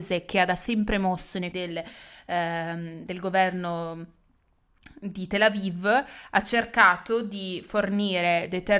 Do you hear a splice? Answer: yes; 1 cut; at 1.5 s

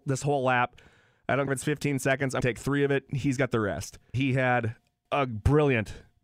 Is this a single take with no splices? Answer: no; 4 cuts; at 1.5 s, 2.4 s, 4.1 s, 5.1 s

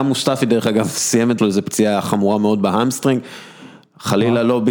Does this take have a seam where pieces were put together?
yes; 1 cut; at 1.4 s

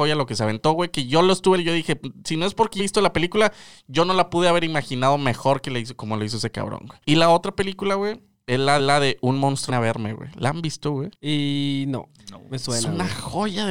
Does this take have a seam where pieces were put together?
yes; 6 cuts; at 1.6 s, 2.8 s, 7.0 s, 8.8 s, 9.7 s, 11.1 s

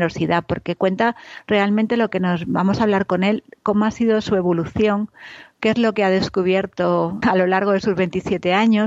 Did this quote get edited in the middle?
yes; 1 cut; at 7.2 s

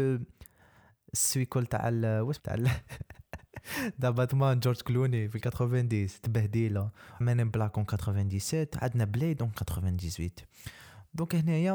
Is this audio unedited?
no; 2 cuts; at 2.4 s, 7.2 s

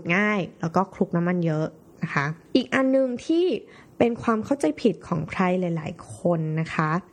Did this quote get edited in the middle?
no; 0 cuts

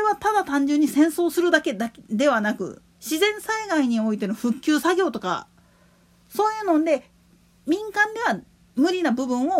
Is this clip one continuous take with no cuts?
no; 2 cuts; at 2.0 s, 2.9 s

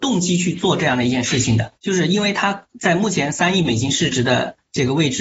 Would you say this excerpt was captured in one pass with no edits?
no; 1 cut; at 1.8 s

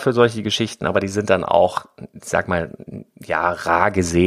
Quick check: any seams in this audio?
no; 0 cuts

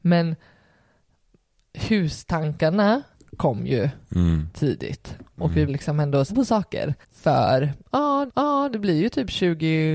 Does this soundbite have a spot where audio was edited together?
yes; 5 cuts; at 3.1 s, 5.7 s, 6.3 s, 7.0 s, 8.3 s

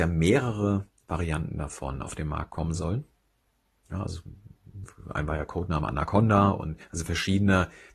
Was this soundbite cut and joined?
no; 0 cuts

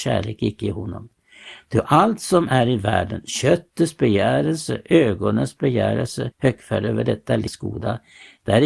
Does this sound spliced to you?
yes; 1 cut; at 6.3 s

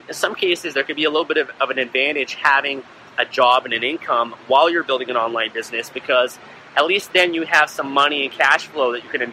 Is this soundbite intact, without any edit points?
yes; 0 cuts

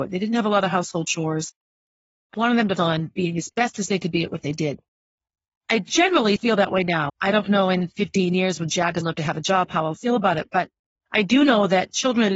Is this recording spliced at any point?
yes; 4 cuts; at 2.3 s, 2.8 s, 6.4 s, 9.0 s

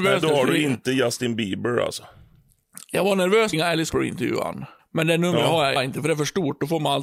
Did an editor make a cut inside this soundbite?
yes; 4 cuts; at 3.5 s, 3.9 s, 4.8 s, 5.8 s

